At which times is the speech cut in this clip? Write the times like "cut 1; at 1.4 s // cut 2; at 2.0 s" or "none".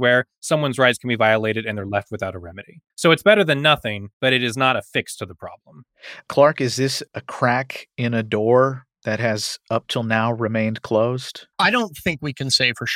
cut 1; at 2.9 s // cut 2; at 4.1 s // cut 3; at 11.5 s